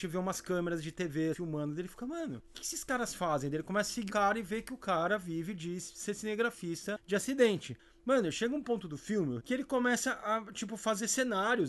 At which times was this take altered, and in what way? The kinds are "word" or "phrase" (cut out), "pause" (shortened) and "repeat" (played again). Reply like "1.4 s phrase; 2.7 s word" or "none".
1.3 s word; 4.1 s word; 9.4 s word